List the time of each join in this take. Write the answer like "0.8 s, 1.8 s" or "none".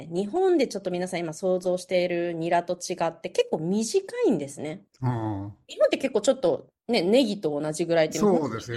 none